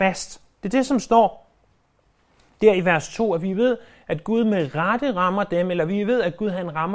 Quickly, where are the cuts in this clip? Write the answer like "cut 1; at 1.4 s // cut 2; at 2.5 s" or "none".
none